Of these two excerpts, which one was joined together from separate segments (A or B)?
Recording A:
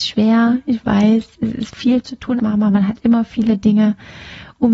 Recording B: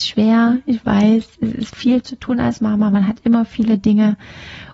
A